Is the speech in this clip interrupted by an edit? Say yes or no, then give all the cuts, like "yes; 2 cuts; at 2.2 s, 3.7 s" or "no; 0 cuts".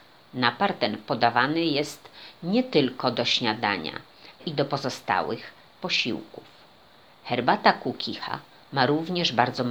yes; 1 cut; at 4.4 s